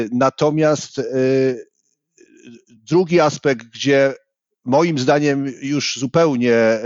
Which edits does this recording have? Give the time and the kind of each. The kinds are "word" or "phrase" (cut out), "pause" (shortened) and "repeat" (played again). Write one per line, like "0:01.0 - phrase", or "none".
none

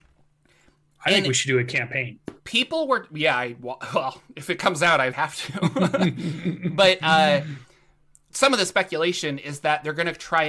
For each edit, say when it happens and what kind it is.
0:05.1 - phrase
0:08.3 - word

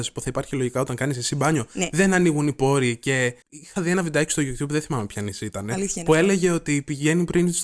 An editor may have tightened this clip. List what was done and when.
0:03.4 - pause

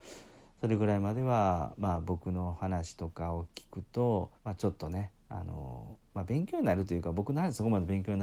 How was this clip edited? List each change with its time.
0:04.4 - pause

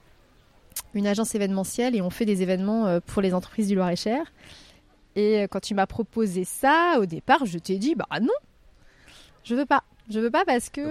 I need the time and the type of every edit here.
none

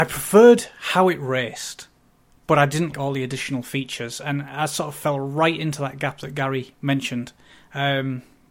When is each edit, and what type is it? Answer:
0:02.9 - word

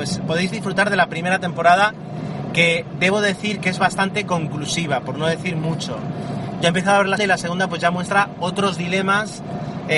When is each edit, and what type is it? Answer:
0:07.2 - word

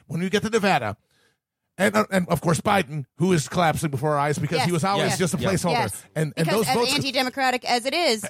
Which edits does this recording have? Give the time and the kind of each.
none

